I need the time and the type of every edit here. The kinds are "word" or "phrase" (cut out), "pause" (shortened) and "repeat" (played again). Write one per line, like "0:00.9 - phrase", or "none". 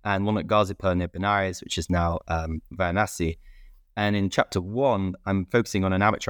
none